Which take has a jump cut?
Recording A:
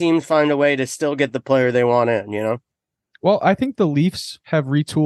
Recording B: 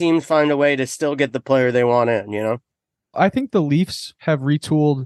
B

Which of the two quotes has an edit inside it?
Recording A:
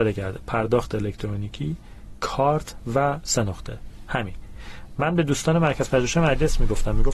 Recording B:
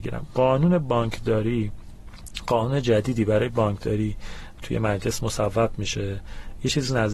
B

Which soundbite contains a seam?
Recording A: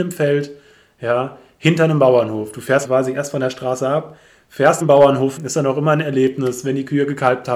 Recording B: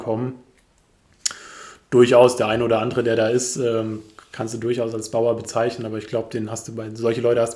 A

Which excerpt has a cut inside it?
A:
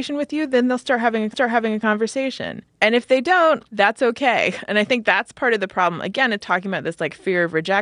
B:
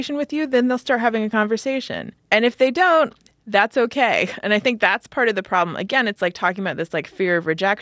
A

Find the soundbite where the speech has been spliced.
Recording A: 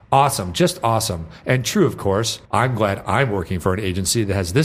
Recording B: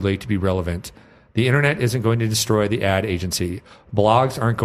A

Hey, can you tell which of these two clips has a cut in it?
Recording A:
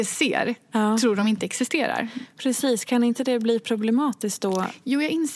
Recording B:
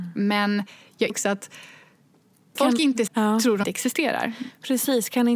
B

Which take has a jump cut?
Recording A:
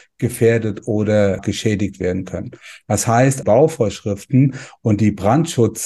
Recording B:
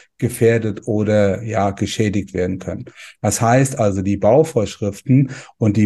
A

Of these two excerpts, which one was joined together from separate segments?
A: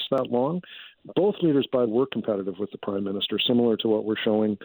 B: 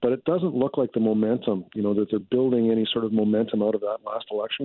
A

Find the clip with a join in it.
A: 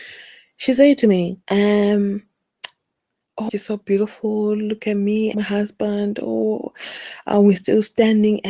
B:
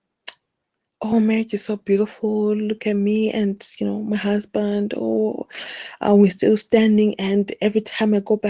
A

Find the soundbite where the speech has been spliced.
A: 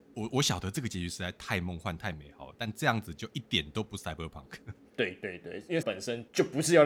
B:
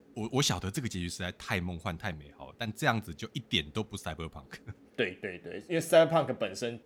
A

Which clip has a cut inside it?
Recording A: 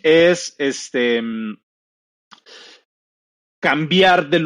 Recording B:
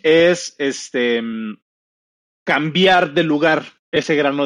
B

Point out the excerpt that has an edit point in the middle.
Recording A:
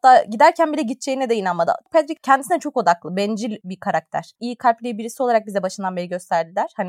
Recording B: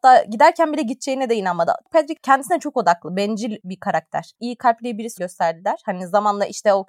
B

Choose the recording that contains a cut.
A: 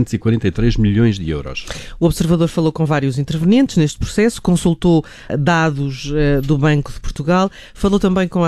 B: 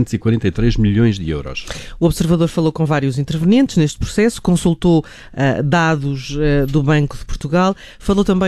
A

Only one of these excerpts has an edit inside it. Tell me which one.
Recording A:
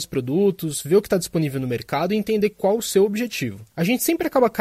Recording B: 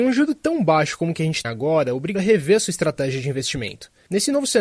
B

